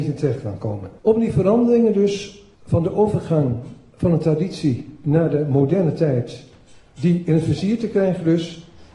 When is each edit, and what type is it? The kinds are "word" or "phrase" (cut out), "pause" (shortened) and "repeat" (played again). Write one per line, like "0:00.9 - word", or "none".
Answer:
0:01.0 - pause
0:02.5 - pause